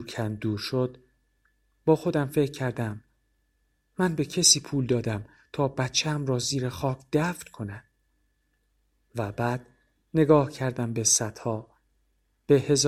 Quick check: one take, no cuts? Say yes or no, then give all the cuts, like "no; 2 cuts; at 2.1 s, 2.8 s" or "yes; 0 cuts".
yes; 0 cuts